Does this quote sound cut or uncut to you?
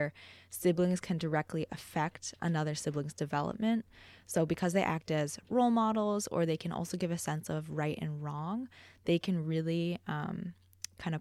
uncut